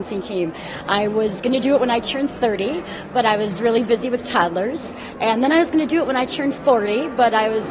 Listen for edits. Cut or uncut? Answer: uncut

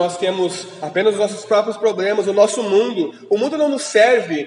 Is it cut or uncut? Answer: uncut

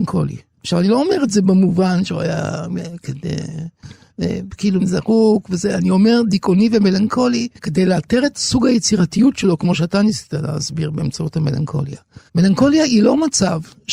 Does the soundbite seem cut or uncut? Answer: cut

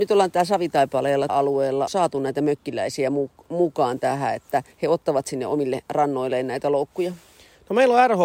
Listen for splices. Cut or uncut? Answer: cut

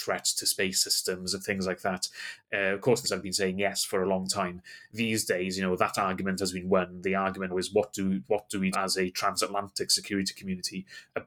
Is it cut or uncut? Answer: cut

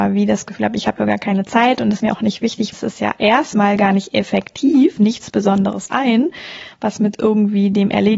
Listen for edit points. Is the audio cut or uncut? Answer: cut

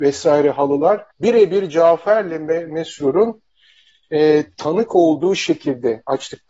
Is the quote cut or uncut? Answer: cut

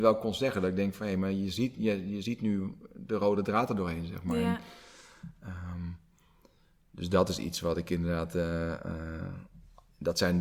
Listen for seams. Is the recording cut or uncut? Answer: uncut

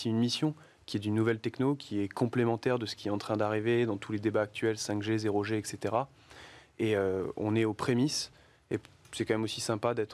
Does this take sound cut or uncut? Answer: uncut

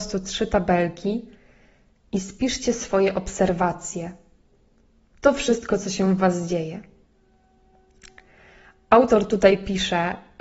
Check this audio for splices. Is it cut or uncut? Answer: uncut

